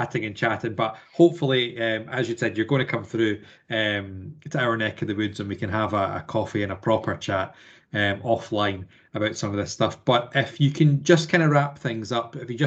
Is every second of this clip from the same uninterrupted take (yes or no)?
yes